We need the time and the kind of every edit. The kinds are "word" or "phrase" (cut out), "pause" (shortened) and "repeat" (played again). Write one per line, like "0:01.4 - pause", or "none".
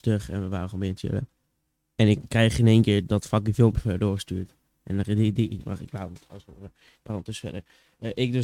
none